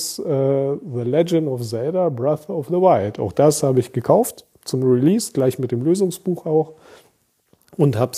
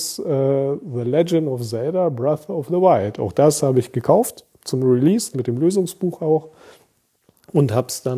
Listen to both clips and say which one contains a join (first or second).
second